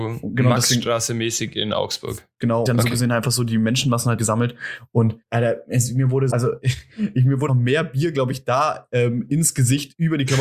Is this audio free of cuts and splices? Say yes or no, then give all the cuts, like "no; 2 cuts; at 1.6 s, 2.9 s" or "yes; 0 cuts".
no; 5 cuts; at 2.7 s, 4.2 s, 5.2 s, 6.3 s, 7.5 s